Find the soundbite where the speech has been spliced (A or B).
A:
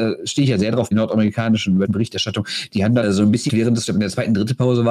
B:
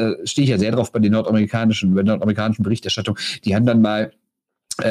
A